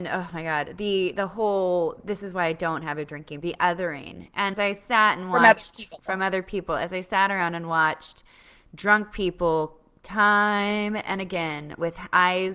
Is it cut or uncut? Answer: cut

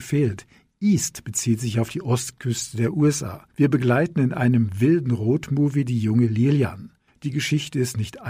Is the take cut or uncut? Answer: cut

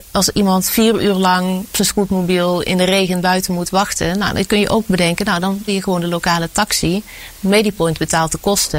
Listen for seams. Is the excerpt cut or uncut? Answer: cut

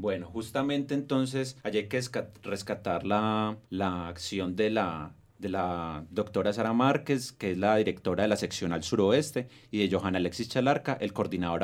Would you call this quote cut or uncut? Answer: cut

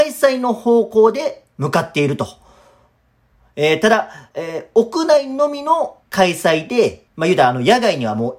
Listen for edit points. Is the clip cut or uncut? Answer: cut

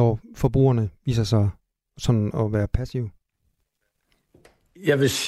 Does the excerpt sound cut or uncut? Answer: uncut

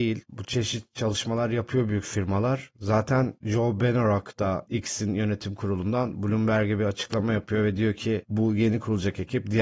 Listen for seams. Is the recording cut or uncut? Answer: uncut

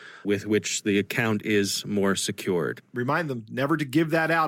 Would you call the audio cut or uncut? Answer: uncut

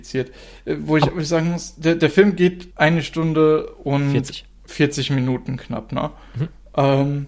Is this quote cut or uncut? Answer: cut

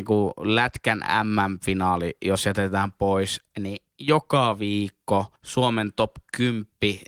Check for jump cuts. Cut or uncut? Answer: cut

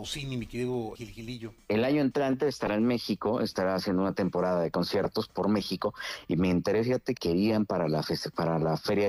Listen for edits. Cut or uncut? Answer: cut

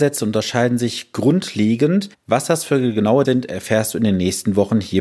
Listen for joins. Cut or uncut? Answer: cut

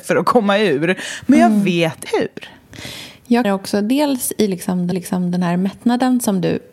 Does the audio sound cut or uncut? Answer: cut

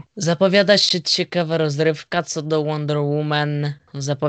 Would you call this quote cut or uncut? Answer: uncut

